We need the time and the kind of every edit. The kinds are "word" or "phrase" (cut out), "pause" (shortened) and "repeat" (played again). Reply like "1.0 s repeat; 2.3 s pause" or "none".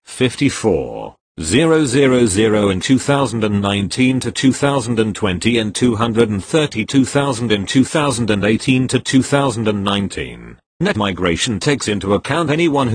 10.9 s word